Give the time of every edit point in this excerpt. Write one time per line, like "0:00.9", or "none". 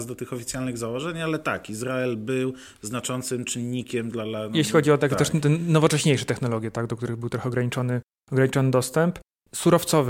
none